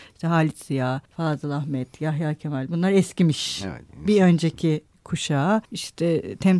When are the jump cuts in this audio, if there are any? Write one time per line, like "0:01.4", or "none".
0:01.0
0:05.6